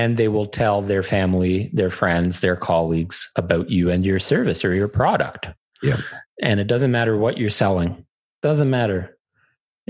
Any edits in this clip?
no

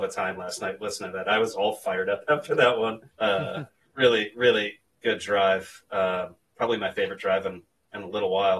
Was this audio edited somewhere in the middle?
yes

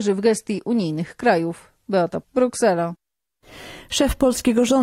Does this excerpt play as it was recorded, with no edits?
no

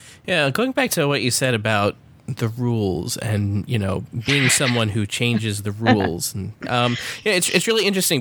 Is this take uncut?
yes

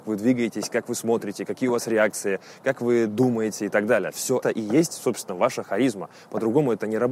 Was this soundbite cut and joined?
yes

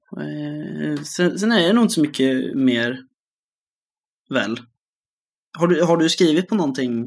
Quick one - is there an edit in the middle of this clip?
no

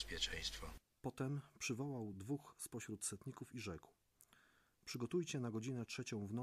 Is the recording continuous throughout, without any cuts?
yes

